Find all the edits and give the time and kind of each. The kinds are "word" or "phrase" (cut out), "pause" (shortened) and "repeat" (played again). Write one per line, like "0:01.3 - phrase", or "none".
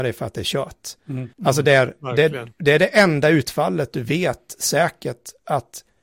0:01.3 - pause